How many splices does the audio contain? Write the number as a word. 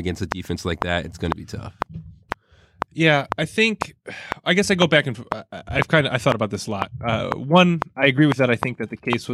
one